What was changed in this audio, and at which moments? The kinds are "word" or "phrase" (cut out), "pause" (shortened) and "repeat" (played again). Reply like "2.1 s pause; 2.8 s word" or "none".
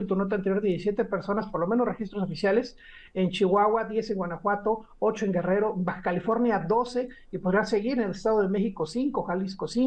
none